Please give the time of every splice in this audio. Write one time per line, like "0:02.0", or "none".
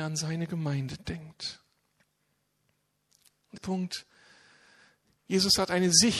0:03.6